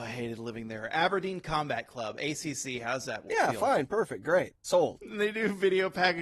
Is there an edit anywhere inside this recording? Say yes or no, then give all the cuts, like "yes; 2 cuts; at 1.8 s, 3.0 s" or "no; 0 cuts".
yes; 1 cut; at 4.6 s